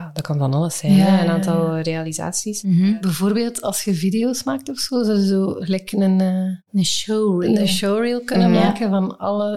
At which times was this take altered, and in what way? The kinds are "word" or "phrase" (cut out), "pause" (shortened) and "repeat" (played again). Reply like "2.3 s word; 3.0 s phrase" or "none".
none